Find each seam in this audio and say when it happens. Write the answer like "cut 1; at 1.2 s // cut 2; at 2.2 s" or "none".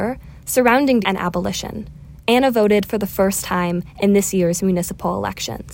cut 1; at 1.0 s